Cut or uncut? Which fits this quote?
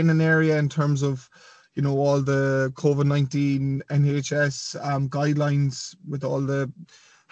uncut